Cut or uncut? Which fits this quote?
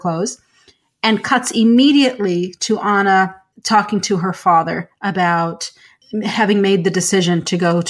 uncut